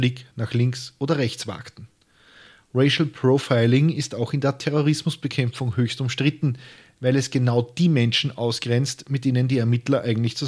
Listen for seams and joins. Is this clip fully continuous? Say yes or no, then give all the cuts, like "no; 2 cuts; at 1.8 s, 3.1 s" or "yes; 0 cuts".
yes; 0 cuts